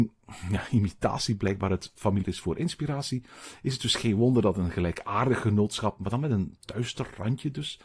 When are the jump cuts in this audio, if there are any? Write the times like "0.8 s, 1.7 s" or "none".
2.2 s